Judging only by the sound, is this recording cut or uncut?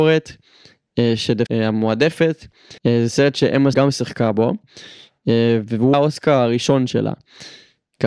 cut